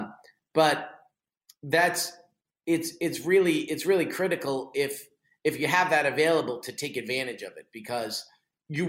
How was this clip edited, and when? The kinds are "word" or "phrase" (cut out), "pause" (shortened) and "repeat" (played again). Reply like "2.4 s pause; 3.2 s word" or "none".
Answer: none